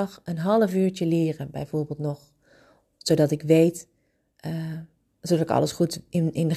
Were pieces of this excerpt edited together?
no; 0 cuts

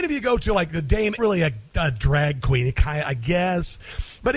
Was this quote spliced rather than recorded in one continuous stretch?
yes; 1 cut; at 1.2 s

